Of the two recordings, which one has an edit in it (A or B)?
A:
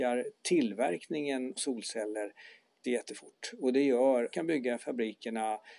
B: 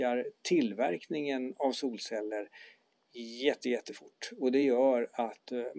A